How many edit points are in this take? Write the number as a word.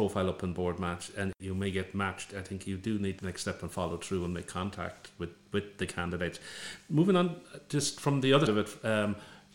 two